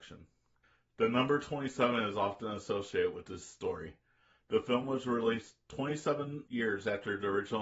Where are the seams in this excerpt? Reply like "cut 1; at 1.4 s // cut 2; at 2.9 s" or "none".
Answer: none